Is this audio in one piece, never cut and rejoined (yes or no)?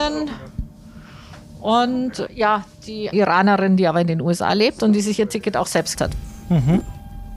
no